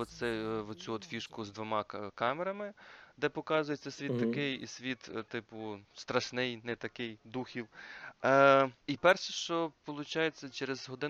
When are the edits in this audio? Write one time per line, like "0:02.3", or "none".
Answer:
0:05.8
0:08.8